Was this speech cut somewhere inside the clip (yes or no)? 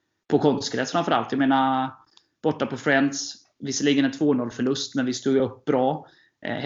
no